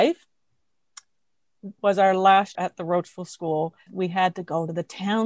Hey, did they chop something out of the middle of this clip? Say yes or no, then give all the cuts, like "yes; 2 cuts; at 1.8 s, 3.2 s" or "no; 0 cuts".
yes; 3 cuts; at 1.8 s, 2.5 s, 3.9 s